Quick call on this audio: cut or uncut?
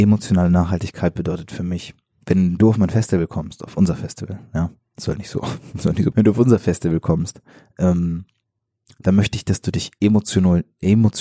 cut